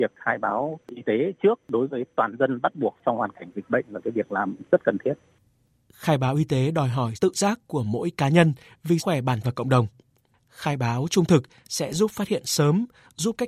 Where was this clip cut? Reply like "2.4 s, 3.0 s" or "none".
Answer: 7.1 s, 9.0 s, 9.4 s